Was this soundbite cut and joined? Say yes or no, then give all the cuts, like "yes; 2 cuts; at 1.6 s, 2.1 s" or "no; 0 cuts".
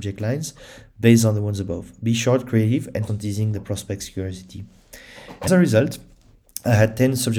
yes; 2 cuts; at 3.1 s, 5.5 s